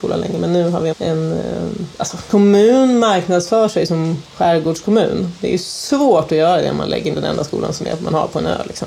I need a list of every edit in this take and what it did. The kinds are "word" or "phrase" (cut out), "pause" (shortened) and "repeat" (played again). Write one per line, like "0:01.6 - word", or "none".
0:00.9 - word
0:02.3 - word
0:07.1 - word